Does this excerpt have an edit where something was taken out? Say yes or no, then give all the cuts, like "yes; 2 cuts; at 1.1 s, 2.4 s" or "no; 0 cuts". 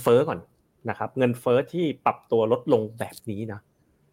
no; 0 cuts